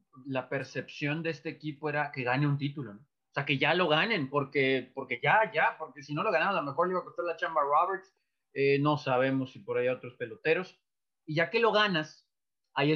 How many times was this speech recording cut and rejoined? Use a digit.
0